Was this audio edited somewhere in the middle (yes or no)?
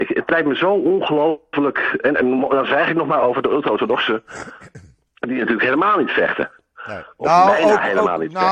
no